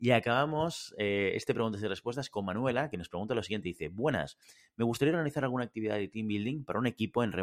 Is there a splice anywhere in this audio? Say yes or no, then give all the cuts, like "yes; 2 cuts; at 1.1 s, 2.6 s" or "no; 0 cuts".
no; 0 cuts